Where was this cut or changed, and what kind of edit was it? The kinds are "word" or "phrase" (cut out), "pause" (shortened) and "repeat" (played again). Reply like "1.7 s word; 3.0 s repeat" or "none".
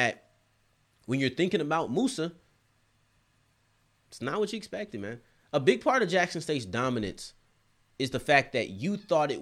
none